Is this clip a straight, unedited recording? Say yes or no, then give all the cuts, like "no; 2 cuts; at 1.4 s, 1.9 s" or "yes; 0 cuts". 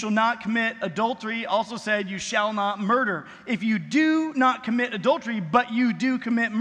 yes; 0 cuts